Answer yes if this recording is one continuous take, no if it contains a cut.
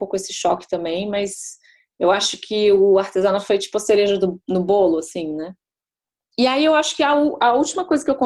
yes